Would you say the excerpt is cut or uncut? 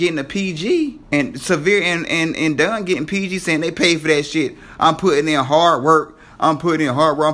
cut